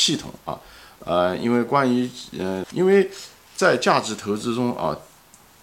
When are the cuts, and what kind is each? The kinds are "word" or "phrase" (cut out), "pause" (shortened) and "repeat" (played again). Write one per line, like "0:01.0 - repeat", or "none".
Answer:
0:02.6 - word